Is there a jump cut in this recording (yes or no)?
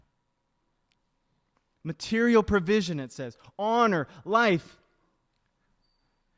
no